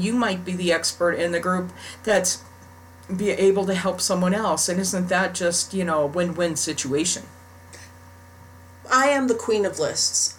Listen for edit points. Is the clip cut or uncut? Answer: cut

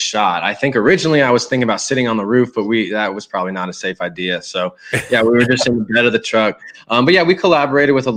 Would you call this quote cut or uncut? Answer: uncut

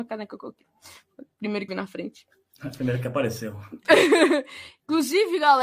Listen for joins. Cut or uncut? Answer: cut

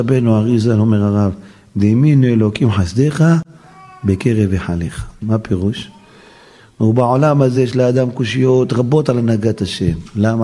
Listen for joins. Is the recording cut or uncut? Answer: uncut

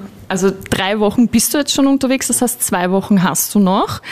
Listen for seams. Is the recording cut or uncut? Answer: uncut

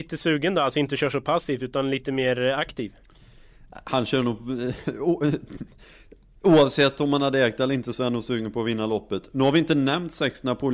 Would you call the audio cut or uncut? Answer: uncut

